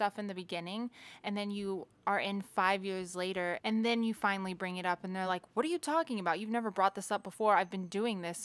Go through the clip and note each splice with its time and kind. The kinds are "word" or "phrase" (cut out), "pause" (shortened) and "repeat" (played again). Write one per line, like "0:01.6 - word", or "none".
none